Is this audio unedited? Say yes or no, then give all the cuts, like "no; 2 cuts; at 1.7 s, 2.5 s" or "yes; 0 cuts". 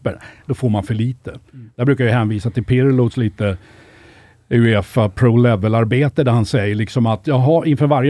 yes; 0 cuts